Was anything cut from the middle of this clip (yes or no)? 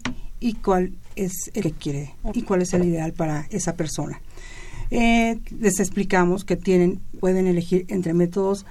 yes